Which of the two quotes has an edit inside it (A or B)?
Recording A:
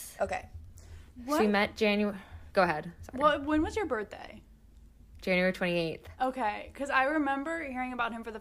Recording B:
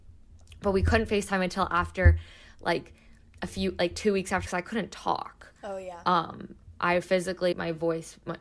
B